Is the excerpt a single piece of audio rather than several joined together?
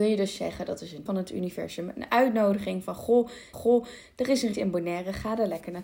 no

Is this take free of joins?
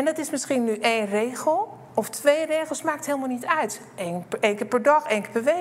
yes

